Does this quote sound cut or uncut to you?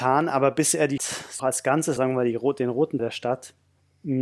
cut